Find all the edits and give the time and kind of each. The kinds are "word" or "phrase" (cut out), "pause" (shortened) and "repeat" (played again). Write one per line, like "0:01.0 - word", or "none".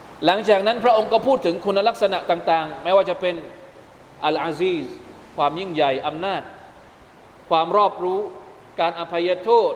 none